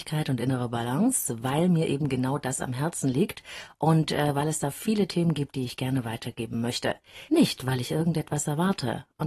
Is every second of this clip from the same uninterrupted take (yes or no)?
yes